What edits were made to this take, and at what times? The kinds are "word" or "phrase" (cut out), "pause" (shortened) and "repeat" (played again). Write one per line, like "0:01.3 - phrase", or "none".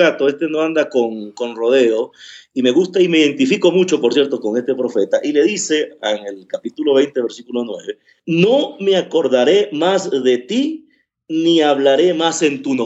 none